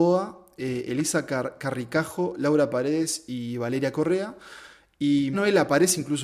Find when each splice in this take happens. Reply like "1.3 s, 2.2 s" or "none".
5.3 s